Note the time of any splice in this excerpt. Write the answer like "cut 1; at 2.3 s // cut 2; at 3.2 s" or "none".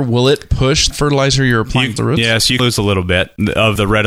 cut 1; at 0.9 s // cut 2; at 2.0 s // cut 3; at 2.6 s